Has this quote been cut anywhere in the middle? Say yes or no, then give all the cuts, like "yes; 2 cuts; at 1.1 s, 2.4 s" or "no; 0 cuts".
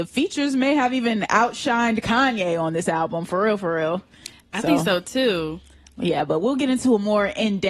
no; 0 cuts